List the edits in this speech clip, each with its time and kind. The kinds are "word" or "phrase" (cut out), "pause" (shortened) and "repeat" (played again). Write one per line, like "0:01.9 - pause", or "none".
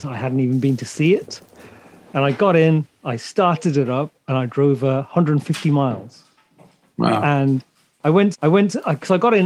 0:08.3 - repeat